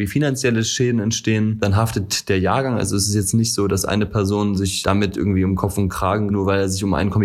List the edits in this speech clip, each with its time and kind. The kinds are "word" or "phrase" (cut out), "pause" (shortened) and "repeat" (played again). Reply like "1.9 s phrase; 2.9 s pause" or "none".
6.3 s word